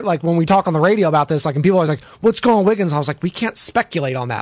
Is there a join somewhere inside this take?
no; 0 cuts

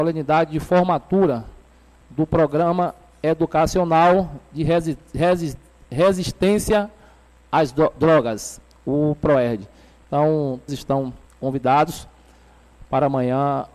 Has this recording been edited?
yes; 2 cuts; at 10.7 s, 11.3 s

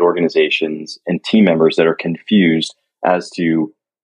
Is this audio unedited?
yes; 0 cuts

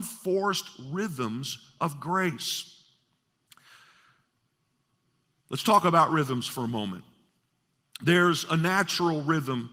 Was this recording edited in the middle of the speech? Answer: no; 0 cuts

